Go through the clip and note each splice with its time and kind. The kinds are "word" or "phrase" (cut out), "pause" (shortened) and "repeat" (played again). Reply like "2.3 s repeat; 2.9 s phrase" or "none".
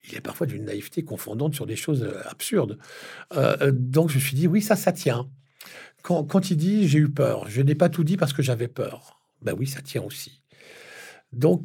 9.3 s pause